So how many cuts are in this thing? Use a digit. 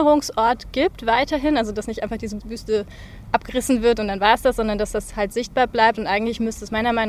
0